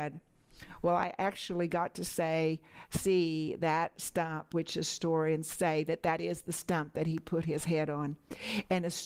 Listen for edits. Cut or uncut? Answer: uncut